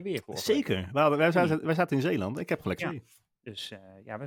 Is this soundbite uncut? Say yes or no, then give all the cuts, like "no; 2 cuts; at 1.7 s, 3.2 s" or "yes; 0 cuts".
no; 1 cut; at 2.8 s